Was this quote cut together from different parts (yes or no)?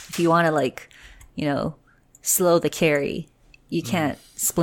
no